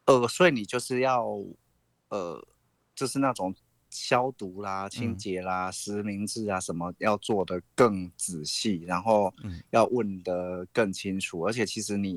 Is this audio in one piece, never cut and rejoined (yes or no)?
yes